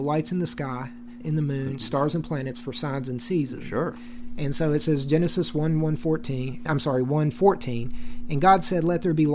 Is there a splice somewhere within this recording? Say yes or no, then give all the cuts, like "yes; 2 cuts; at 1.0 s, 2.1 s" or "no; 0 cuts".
yes; 2 cuts; at 1.2 s, 6.7 s